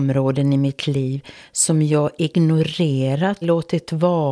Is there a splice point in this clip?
yes; 1 cut; at 3.4 s

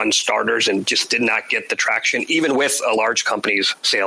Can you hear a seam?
no; 0 cuts

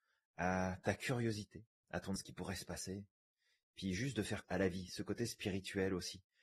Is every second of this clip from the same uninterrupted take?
no; 3 cuts; at 1.7 s, 2.2 s, 4.4 s

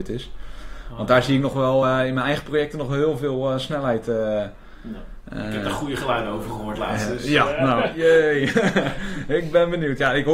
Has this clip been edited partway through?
no; 0 cuts

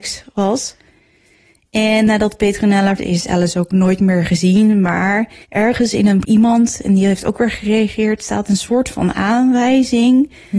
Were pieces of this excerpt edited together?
yes; 3 cuts; at 3.0 s, 5.4 s, 6.2 s

